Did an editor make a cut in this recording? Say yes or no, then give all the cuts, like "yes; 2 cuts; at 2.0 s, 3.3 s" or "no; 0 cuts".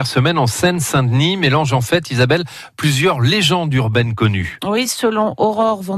no; 0 cuts